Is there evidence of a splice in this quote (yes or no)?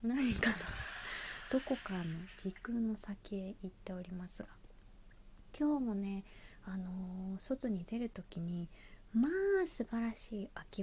no